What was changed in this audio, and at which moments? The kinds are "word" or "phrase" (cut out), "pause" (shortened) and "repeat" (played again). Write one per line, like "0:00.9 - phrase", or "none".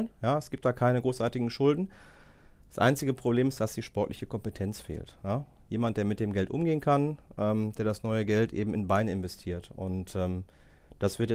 none